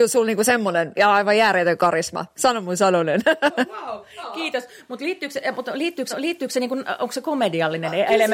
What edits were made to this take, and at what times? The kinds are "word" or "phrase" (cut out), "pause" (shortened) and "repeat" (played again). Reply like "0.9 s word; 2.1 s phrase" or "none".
0.9 s phrase; 6.1 s repeat